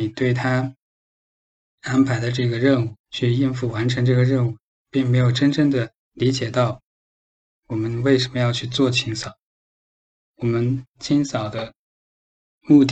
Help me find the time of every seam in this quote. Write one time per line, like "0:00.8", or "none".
0:03.0
0:06.0